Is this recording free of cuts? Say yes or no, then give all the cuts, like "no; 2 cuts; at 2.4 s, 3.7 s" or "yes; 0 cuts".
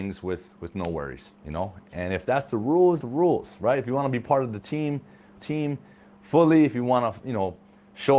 no; 3 cuts; at 1.4 s, 3.0 s, 5.4 s